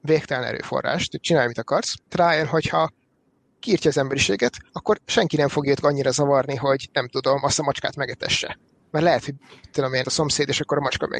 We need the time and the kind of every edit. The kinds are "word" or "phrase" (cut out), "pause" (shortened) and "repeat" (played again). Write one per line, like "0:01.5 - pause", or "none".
0:02.1 - word
0:04.7 - pause
0:05.8 - word
0:10.0 - word